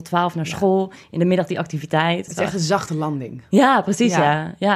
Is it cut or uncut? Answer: cut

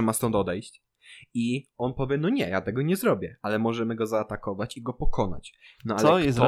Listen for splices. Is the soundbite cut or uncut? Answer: uncut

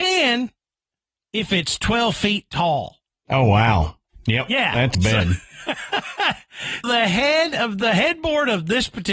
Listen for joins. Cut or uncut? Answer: cut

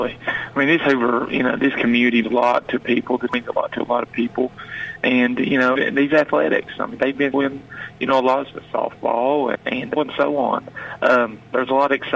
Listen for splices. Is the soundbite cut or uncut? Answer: cut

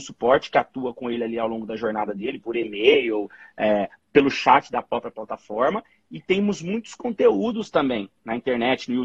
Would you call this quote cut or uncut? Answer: uncut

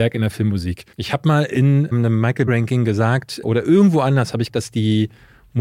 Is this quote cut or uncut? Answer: cut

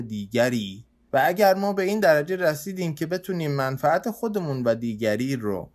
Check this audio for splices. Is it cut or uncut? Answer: uncut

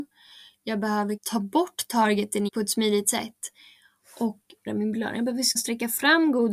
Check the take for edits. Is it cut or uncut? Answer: cut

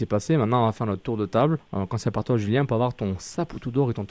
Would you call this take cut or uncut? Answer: cut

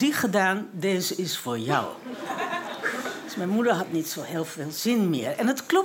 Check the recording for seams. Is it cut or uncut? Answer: uncut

